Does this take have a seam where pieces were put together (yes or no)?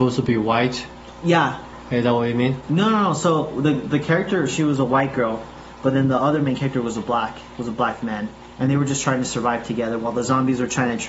no